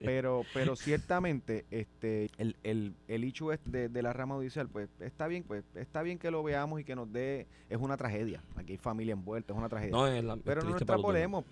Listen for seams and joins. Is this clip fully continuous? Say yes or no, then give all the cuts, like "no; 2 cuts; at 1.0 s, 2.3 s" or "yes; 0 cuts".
no; 3 cuts; at 2.3 s, 3.7 s, 5.4 s